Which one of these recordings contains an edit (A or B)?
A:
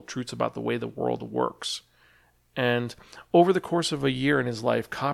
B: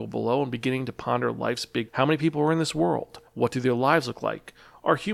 B